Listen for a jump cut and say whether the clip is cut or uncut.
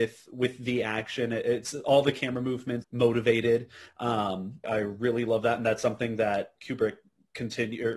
cut